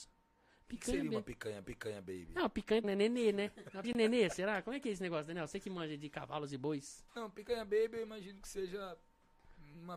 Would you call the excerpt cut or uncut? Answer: cut